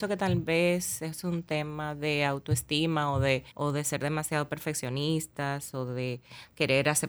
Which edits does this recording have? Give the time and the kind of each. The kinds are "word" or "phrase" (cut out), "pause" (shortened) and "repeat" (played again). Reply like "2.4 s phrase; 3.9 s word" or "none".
3.5 s pause